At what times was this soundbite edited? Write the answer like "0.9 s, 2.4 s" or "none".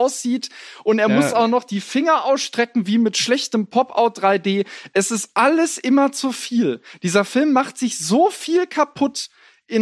none